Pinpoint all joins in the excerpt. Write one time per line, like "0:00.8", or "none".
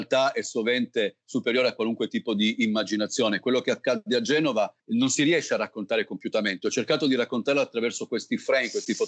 0:04.8